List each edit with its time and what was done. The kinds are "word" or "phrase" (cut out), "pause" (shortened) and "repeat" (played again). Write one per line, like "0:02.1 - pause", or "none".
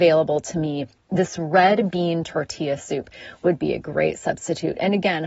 none